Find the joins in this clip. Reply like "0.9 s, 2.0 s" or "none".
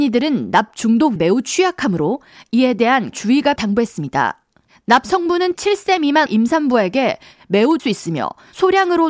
1.2 s, 3.1 s, 3.6 s, 5.5 s, 6.3 s, 7.8 s